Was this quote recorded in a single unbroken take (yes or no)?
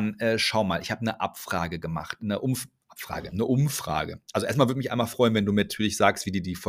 yes